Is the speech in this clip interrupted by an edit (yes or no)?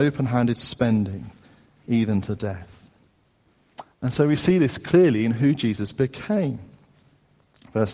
yes